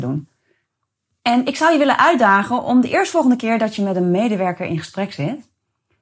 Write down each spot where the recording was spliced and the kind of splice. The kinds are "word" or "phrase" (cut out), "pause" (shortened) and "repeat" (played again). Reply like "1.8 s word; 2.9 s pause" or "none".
none